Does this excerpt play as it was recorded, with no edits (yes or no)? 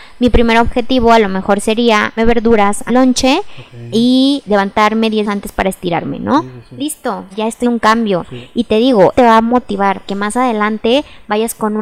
no